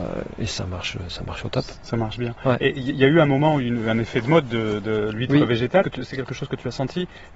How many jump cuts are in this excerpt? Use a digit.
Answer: 1